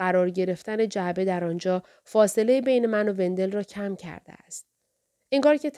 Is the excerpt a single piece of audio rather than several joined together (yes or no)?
yes